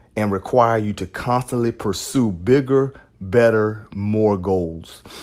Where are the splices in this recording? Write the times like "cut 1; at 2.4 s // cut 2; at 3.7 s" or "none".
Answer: none